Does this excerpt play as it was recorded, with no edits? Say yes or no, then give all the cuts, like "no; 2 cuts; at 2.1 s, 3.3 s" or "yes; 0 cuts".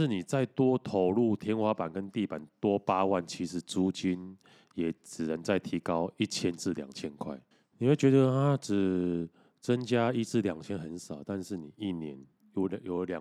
no; 1 cut; at 7.5 s